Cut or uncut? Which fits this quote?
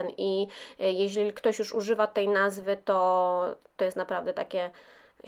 uncut